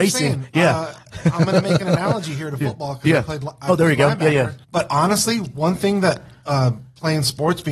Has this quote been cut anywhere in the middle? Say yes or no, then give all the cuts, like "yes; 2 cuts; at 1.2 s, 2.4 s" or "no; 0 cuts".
yes; 1 cut; at 4.6 s